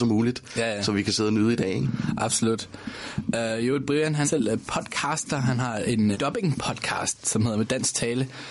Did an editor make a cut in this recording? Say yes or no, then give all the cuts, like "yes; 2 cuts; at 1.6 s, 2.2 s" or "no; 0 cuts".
yes; 2 cuts; at 4.2 s, 6.1 s